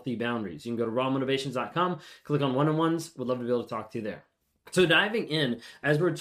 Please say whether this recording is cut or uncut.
cut